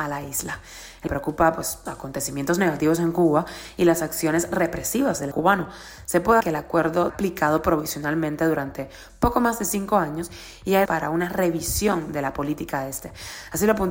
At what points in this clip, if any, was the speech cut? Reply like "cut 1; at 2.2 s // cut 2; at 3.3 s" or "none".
cut 1; at 1.1 s // cut 2; at 1.9 s // cut 3; at 5.3 s // cut 4; at 6.4 s // cut 5; at 7.1 s // cut 6; at 10.9 s

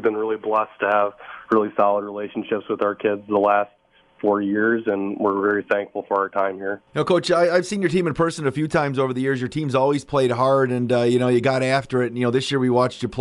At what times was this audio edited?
cut 1; at 6.9 s

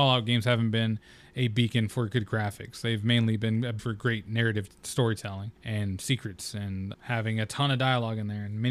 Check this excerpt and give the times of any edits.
cut 1; at 3.8 s // cut 2; at 5.6 s // cut 3; at 6.9 s

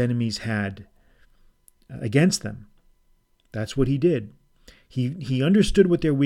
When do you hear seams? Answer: none

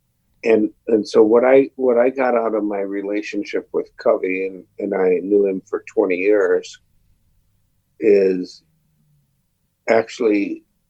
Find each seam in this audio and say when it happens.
none

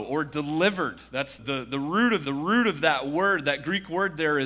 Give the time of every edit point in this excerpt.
cut 1; at 1.4 s // cut 2; at 2.3 s

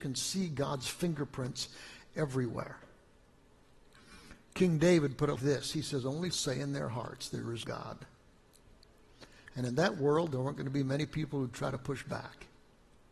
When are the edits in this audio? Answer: cut 1; at 5.4 s // cut 2; at 6.3 s // cut 3; at 7.6 s

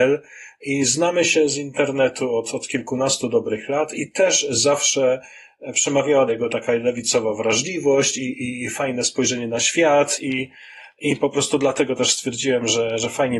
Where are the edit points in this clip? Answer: cut 1; at 6.3 s

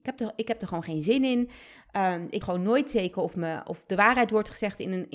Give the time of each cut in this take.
cut 1; at 2.4 s

